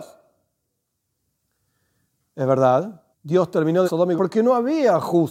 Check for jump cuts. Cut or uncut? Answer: cut